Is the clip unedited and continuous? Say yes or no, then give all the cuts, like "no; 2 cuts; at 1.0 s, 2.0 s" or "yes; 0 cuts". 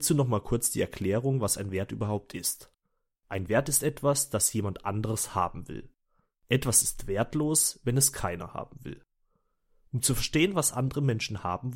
yes; 0 cuts